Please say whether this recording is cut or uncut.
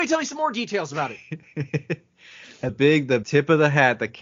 cut